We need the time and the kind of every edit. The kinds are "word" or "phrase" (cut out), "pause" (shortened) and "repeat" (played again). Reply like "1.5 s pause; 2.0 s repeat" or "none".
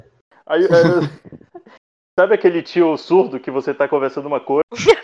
none